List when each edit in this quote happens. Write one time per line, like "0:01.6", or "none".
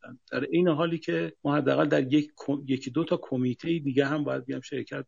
0:01.4